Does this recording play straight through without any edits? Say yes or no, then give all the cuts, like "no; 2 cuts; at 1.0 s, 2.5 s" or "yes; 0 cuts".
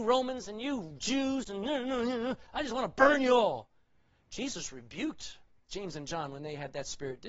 yes; 0 cuts